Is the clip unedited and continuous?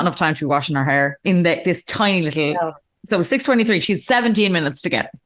yes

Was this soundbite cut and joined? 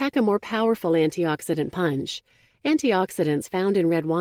no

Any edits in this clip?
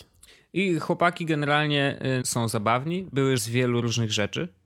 yes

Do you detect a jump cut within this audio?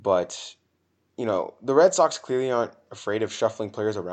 no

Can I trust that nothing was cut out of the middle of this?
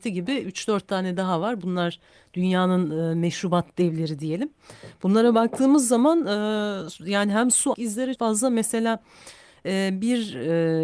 no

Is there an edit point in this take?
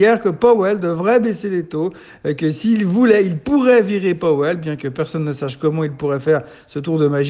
no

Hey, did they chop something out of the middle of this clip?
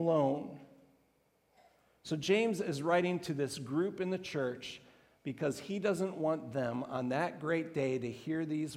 no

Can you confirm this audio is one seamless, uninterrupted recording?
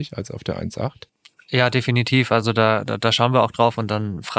yes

